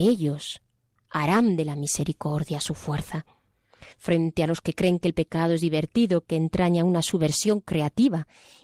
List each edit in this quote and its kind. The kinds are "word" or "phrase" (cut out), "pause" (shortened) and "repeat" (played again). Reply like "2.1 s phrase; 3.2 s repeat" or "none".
3.9 s pause